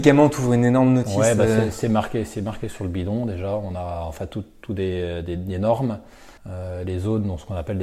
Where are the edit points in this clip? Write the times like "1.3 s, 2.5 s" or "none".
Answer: 6.4 s